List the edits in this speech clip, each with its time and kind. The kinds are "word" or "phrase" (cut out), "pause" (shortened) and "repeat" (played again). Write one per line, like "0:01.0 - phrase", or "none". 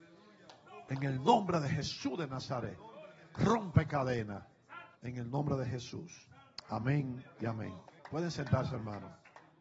0:04.9 - pause
0:08.0 - pause